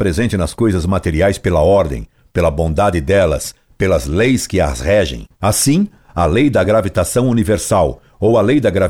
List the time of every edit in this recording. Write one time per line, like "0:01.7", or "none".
none

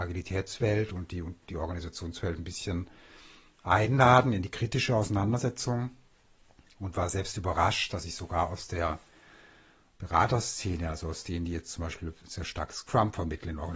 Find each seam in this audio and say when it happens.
none

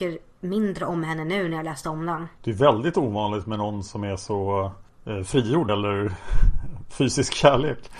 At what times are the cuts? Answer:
0:05.7

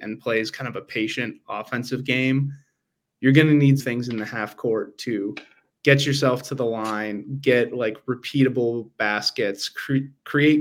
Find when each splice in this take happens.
0:03.8

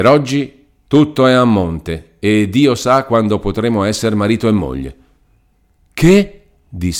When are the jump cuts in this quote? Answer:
none

